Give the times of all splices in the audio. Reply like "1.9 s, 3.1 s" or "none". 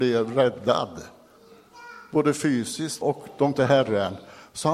3.0 s, 3.5 s